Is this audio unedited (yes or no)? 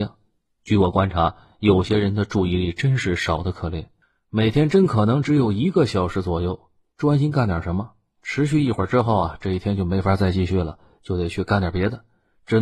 yes